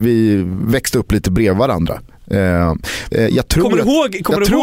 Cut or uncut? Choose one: cut